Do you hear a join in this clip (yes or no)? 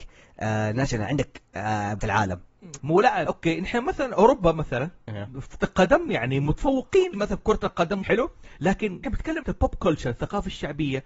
yes